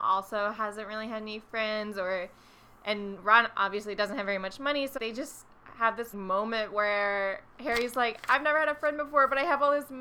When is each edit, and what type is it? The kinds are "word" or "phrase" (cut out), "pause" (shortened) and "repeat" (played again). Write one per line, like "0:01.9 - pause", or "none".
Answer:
0:05.0 - word
0:06.1 - word